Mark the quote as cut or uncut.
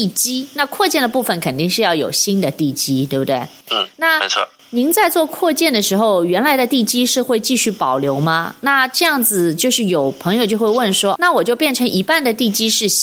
cut